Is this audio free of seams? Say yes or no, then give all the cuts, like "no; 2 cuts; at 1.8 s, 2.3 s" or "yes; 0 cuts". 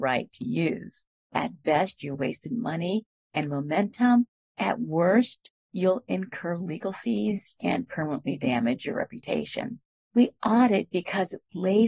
yes; 0 cuts